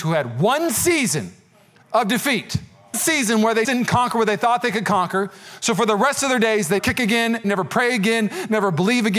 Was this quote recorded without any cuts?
no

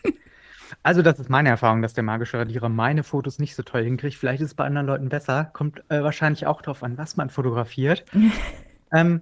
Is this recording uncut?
yes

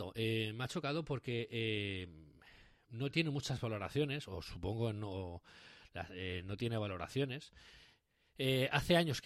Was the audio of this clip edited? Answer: no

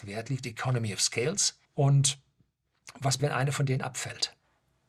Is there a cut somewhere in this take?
yes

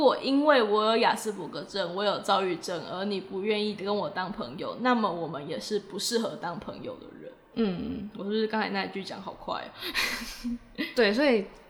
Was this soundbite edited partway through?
no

